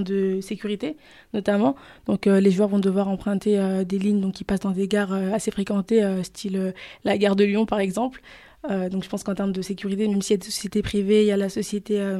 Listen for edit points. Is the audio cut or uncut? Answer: uncut